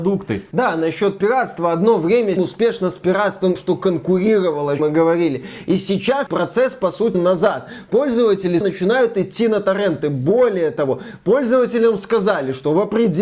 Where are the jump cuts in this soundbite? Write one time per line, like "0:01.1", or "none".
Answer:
0:02.4
0:03.6
0:04.8
0:06.3
0:07.1
0:08.6